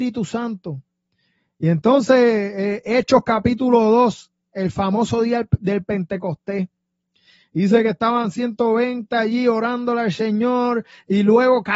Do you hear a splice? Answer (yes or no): no